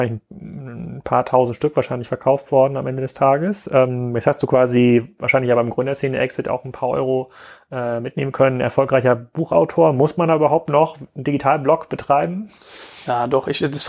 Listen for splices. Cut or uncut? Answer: uncut